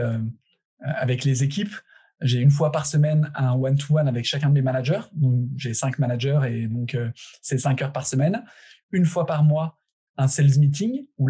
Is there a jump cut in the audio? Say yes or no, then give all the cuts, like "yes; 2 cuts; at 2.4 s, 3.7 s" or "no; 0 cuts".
no; 0 cuts